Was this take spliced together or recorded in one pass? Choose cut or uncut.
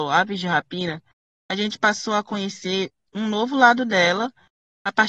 uncut